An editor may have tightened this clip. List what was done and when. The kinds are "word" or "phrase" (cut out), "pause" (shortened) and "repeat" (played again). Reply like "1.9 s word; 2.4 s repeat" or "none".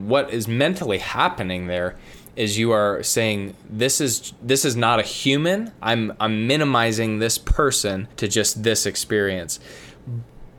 5.7 s pause; 8.1 s pause